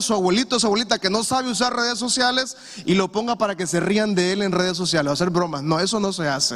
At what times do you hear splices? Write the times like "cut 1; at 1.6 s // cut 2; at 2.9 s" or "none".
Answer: none